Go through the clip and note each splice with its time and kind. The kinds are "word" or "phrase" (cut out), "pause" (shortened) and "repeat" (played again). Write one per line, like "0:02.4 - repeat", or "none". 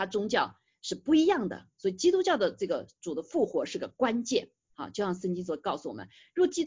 none